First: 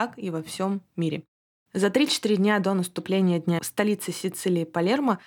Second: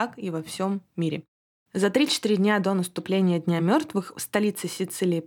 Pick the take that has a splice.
first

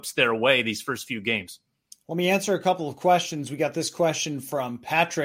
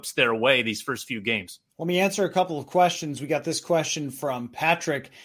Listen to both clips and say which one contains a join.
second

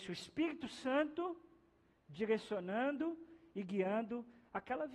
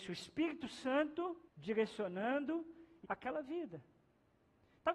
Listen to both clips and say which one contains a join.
second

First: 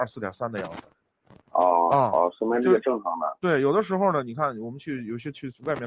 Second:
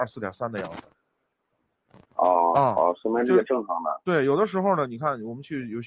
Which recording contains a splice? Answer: first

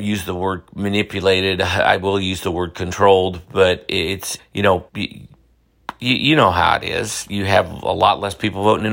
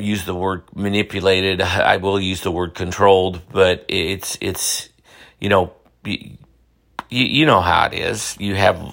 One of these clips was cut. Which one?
first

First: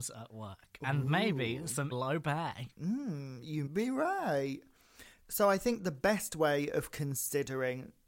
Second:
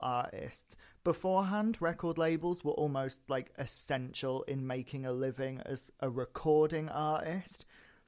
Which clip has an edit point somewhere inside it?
first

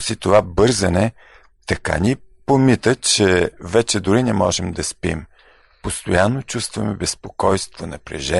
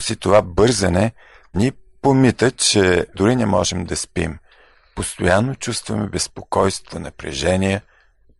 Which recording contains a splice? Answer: second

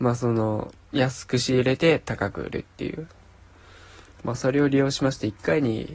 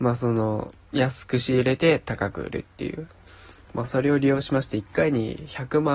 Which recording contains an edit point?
second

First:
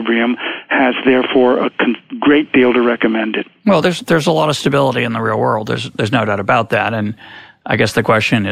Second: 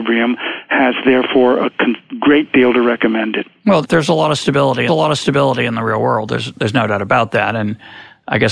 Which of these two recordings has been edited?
second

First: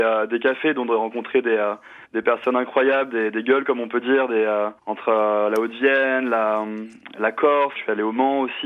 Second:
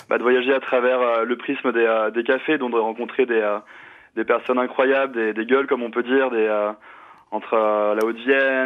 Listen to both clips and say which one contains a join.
first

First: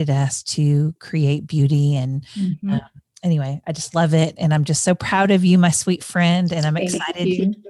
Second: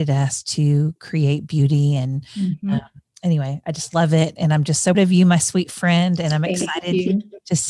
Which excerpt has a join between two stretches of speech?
second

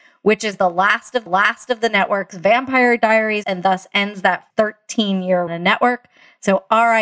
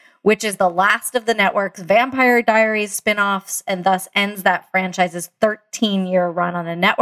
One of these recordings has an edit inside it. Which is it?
first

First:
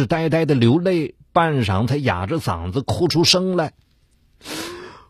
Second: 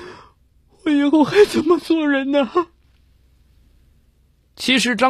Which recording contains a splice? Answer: second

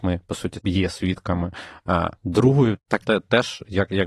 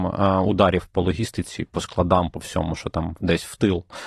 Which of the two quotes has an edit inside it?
first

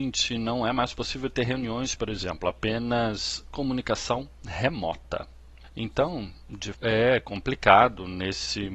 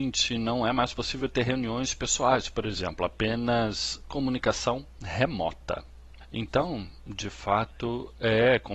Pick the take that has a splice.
first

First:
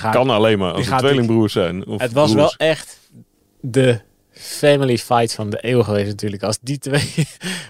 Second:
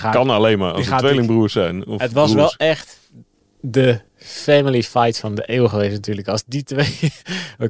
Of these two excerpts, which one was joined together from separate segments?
second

